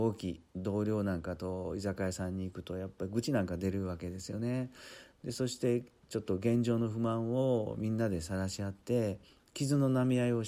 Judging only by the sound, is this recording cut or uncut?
uncut